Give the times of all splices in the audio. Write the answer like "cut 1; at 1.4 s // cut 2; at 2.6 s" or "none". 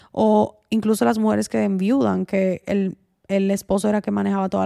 none